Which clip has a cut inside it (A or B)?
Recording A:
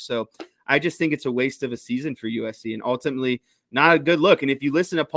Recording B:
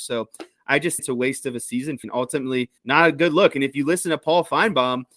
B